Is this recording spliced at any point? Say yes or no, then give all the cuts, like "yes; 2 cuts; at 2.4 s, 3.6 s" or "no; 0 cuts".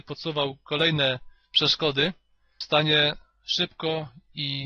yes; 1 cut; at 2.6 s